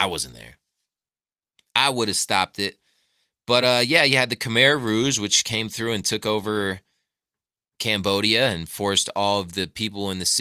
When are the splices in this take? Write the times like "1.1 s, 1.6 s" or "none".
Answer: none